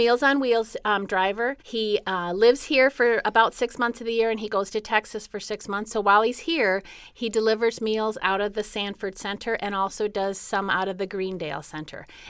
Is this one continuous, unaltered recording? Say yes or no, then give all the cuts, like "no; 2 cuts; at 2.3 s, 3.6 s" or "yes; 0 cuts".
no; 1 cut; at 1.6 s